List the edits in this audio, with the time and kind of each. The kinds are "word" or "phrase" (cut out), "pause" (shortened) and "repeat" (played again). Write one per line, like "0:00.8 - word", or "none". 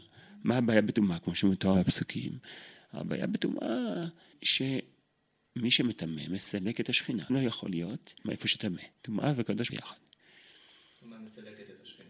0:04.3 - word
0:07.3 - word
0:08.2 - pause
0:08.9 - pause
0:09.7 - phrase